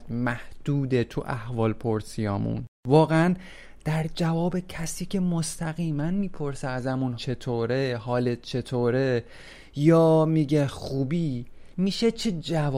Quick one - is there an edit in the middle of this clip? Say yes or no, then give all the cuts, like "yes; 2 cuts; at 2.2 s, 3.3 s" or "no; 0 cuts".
yes; 1 cut; at 7.2 s